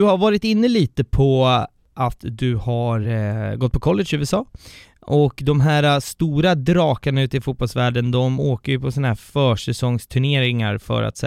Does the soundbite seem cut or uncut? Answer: uncut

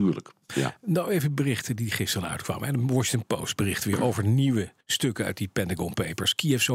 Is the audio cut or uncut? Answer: cut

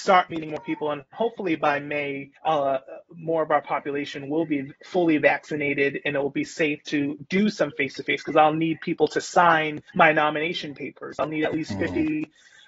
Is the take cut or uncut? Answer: cut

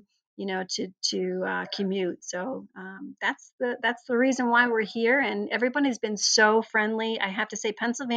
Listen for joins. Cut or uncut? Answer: uncut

